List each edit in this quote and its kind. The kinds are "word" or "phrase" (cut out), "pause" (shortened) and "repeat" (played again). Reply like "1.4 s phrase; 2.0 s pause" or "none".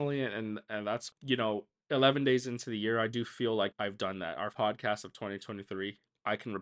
1.1 s word; 3.7 s word; 4.5 s word